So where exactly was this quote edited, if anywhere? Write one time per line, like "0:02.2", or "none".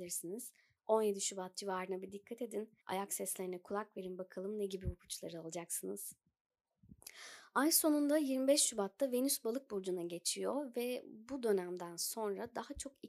0:02.8